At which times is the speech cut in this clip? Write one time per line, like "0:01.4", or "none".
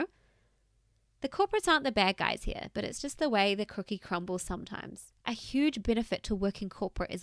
0:05.2